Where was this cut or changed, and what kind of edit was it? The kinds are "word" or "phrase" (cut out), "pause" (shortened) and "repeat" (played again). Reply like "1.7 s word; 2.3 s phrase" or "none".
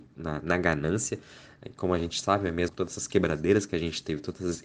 2.7 s word